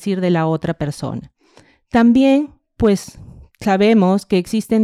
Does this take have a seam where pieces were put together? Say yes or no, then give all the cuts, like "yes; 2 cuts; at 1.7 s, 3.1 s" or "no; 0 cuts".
no; 0 cuts